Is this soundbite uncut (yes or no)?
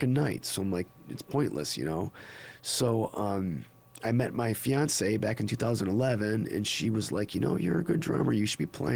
yes